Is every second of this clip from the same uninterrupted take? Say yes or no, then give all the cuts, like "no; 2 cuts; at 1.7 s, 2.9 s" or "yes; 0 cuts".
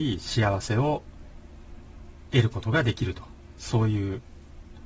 yes; 0 cuts